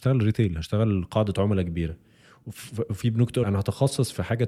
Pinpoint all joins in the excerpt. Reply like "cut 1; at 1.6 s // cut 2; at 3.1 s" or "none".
cut 1; at 3.4 s